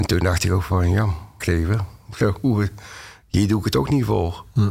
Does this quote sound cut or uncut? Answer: cut